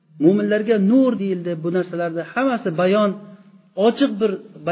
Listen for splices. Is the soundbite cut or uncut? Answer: cut